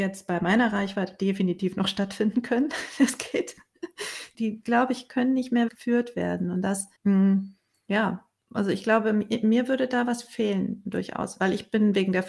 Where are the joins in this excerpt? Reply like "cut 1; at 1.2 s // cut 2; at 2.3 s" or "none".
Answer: cut 1; at 4.3 s // cut 2; at 5.7 s // cut 3; at 7.0 s